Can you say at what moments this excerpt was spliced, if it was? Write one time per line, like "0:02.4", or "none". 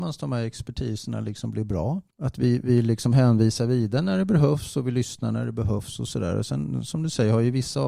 0:02.1